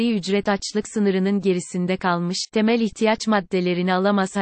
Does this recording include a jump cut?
no; 0 cuts

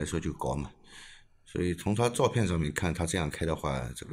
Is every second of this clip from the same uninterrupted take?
yes; 0 cuts

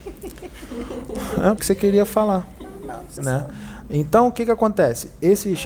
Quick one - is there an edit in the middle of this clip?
yes; 2 cuts; at 1.6 s, 3.2 s

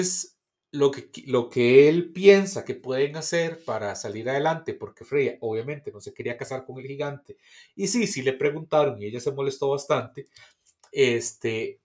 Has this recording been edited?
no; 0 cuts

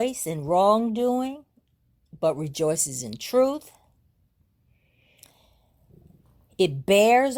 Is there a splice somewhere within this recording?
no; 0 cuts

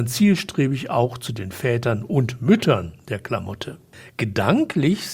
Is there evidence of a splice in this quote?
no; 0 cuts

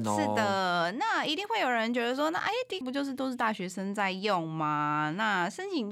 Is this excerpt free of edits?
no; 1 cut; at 2.8 s

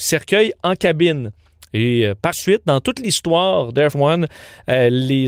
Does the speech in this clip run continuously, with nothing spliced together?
no; 2 cuts; at 2.3 s, 3.9 s

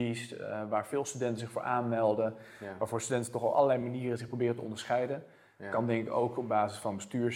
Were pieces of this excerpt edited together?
no; 0 cuts

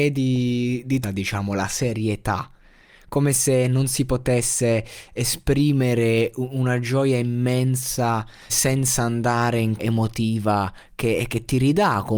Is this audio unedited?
no; 4 cuts; at 1.0 s, 5.2 s, 8.5 s, 9.8 s

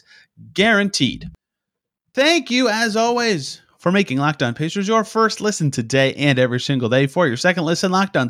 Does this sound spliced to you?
no; 0 cuts

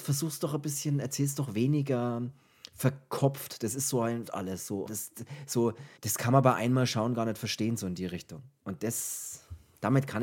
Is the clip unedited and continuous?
no; 3 cuts; at 4.3 s, 4.9 s, 6.0 s

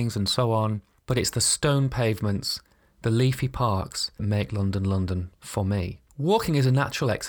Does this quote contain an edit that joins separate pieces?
yes; 1 cut; at 4.2 s

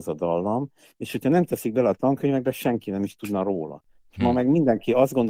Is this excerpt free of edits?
yes; 0 cuts

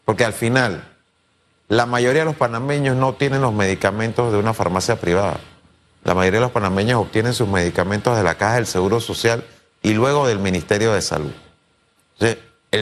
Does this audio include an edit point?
no; 0 cuts

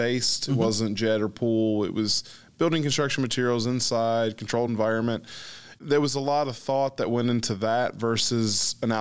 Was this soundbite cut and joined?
no; 0 cuts

